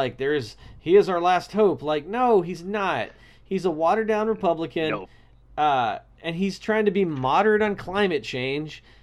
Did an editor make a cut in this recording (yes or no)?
no